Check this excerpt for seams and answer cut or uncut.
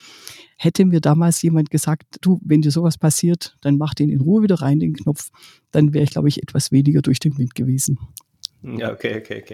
uncut